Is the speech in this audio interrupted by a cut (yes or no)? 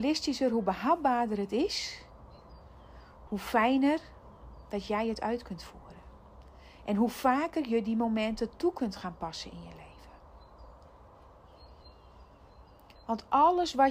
no